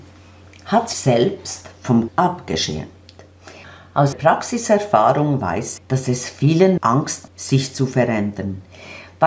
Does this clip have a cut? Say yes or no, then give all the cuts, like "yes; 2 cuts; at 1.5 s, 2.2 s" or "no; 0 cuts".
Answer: yes; 6 cuts; at 0.9 s, 2.1 s, 4.1 s, 5.8 s, 6.8 s, 7.3 s